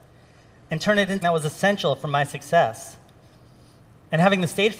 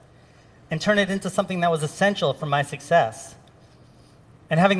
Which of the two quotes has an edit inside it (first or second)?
first